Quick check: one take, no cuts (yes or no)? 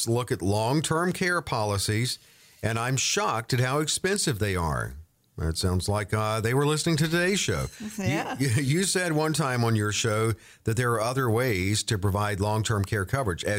yes